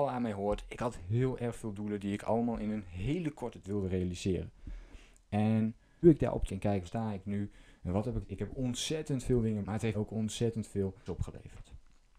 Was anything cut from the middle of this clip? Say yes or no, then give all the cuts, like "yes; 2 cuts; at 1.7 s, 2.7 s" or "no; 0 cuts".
yes; 8 cuts; at 3.6 s, 6.0 s, 6.5 s, 6.9 s, 8.2 s, 9.6 s, 9.9 s, 11.1 s